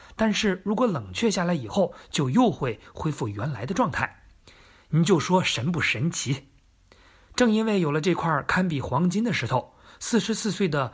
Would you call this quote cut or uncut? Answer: uncut